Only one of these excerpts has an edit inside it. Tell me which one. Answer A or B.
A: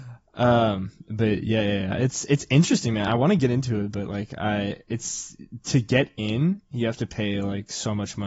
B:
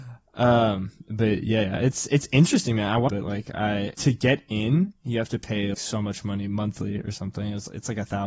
B